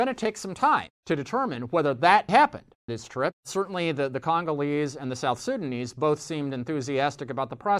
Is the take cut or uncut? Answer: cut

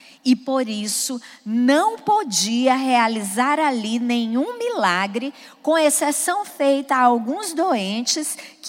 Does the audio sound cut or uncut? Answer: uncut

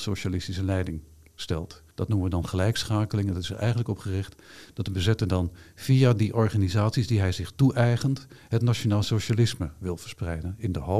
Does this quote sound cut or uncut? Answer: cut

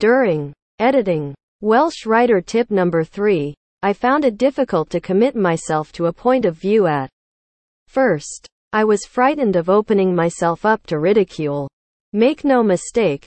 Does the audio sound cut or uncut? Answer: uncut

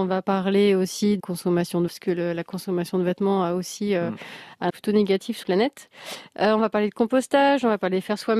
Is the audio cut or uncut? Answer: cut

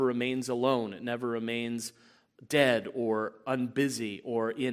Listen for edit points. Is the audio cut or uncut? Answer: uncut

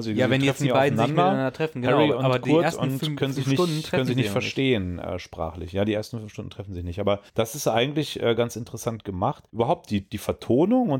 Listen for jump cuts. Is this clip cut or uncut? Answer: cut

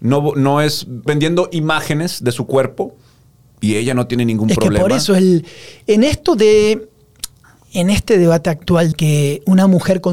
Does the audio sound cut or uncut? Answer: cut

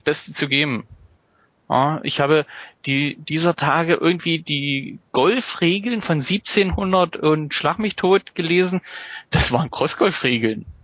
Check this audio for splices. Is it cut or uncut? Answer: cut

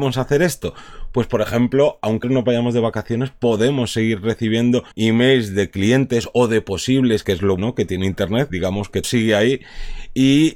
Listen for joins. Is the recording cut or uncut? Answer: cut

